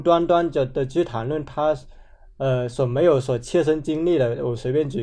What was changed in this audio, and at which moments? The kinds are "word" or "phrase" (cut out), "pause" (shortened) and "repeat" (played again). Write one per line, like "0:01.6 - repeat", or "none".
none